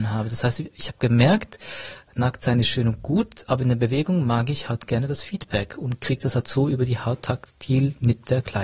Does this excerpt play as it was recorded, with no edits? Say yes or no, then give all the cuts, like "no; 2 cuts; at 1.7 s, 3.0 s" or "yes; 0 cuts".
yes; 0 cuts